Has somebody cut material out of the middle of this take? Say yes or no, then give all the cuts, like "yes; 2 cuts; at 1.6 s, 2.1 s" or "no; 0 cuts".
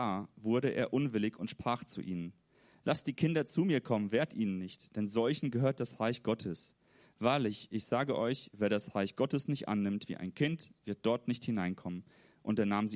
no; 0 cuts